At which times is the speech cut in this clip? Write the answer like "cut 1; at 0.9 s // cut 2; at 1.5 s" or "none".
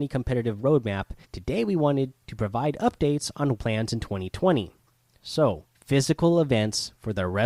cut 1; at 1.2 s // cut 2; at 2.2 s // cut 3; at 3.6 s // cut 4; at 5.7 s